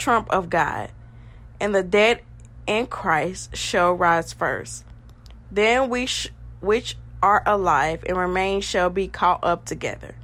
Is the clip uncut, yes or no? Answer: yes